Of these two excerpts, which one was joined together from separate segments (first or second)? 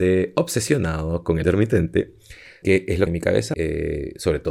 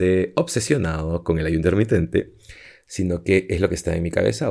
first